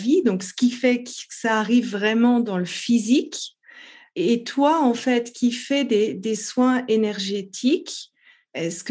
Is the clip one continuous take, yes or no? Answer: yes